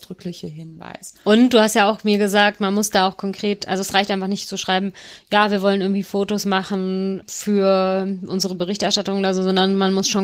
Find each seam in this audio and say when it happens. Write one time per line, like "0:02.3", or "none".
none